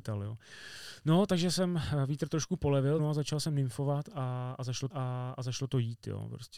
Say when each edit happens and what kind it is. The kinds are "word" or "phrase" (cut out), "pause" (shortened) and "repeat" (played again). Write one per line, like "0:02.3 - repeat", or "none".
0:03.0 - phrase
0:04.9 - repeat

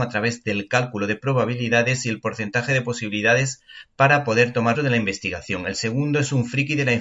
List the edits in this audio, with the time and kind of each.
0:04.7 - phrase

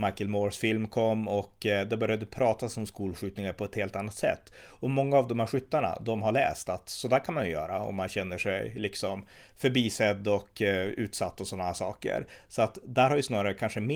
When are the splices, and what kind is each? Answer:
none

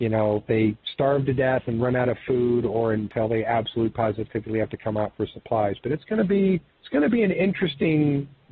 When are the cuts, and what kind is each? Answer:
0:06.7 - pause

